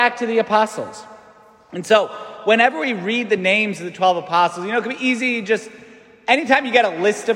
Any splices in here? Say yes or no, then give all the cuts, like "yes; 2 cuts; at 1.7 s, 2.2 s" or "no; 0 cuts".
no; 0 cuts